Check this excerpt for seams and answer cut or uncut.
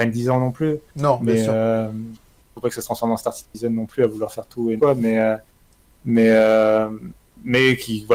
cut